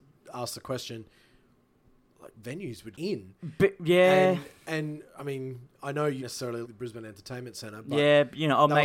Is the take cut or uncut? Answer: cut